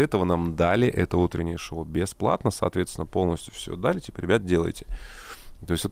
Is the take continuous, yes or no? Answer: yes